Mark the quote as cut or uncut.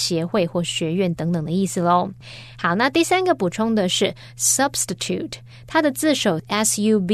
uncut